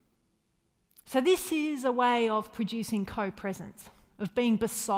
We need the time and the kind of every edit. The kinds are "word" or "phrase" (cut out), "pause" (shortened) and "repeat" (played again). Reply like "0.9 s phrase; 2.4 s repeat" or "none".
none